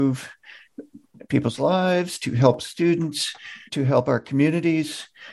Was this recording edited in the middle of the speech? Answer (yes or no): yes